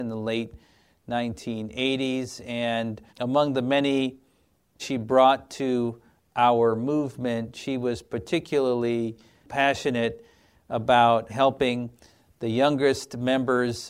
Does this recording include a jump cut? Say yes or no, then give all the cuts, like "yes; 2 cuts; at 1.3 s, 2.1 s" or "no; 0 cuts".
yes; 3 cuts; at 3.1 s, 4.8 s, 11.3 s